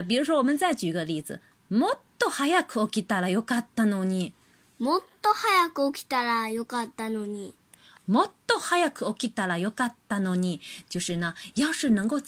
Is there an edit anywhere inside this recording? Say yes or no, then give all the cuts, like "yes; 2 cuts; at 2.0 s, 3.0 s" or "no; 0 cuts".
no; 0 cuts